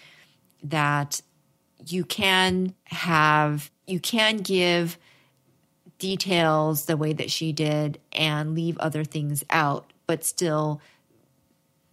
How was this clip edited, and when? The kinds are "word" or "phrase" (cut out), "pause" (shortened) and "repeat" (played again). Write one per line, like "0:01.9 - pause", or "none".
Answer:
none